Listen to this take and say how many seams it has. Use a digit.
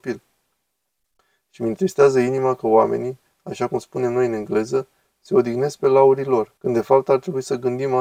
1